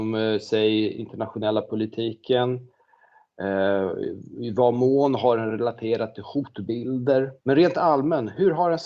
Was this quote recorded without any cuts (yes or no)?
no